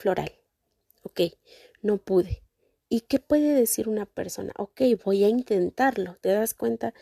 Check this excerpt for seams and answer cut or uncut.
uncut